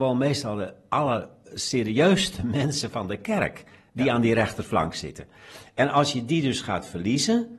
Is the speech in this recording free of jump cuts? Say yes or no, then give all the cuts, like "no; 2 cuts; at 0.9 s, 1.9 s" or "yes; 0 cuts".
yes; 0 cuts